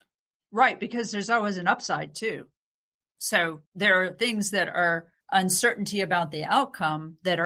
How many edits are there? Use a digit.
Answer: 2